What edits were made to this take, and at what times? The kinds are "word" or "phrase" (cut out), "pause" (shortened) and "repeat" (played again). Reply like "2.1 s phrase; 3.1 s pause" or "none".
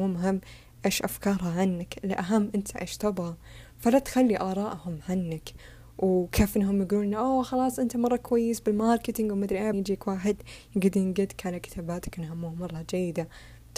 9.7 s word